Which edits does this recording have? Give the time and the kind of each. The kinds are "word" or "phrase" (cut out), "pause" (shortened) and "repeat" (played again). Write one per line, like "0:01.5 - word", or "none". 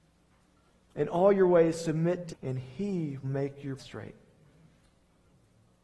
0:02.3 - word
0:03.2 - word
0:03.8 - word